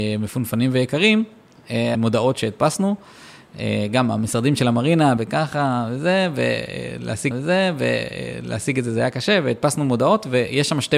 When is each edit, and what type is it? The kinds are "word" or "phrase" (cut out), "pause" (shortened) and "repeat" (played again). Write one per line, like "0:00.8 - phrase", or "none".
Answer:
0:01.9 - phrase
0:05.2 - word
0:07.3 - repeat